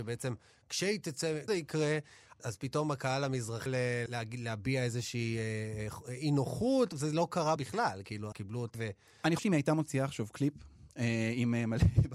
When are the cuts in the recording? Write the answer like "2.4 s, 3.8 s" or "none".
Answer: 1.5 s, 2.4 s, 3.7 s, 4.1 s, 6.9 s, 7.6 s, 8.3 s, 8.7 s, 9.4 s